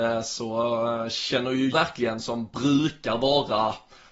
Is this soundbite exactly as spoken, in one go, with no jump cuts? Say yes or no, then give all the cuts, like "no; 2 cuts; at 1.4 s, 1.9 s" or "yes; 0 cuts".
no; 1 cut; at 1.7 s